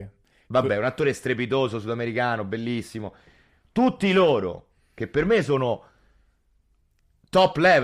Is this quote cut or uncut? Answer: uncut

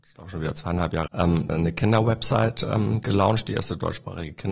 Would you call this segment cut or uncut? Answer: cut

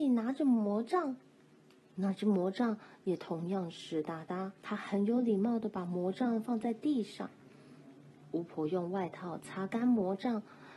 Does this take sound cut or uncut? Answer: cut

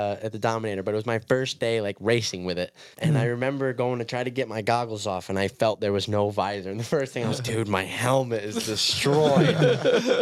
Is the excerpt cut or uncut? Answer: cut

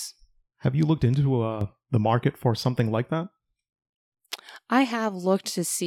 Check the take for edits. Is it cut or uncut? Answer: uncut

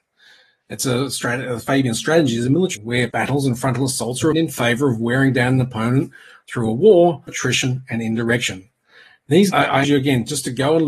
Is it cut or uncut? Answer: cut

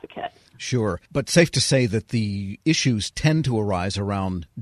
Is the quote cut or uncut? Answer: cut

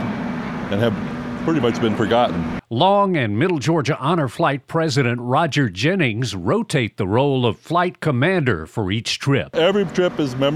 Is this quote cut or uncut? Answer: uncut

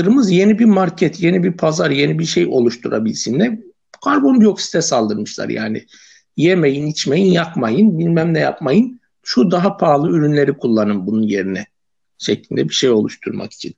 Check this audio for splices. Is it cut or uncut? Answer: uncut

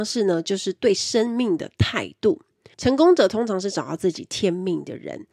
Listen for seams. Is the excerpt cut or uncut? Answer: uncut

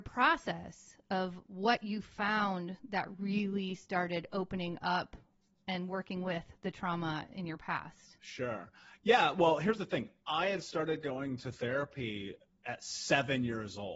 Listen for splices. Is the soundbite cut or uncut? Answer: uncut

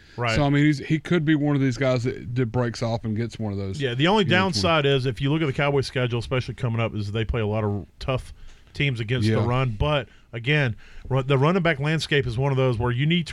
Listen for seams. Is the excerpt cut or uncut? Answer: cut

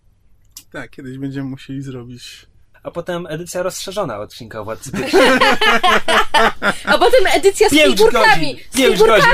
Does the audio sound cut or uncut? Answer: uncut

